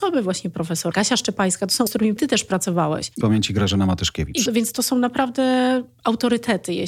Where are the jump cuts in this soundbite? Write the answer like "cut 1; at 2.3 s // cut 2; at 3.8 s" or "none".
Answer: cut 1; at 0.9 s // cut 2; at 1.9 s // cut 3; at 2.2 s // cut 4; at 3.2 s // cut 5; at 4.5 s